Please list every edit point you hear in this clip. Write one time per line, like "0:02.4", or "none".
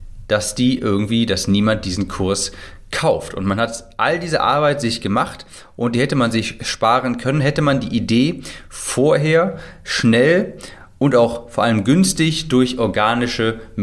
none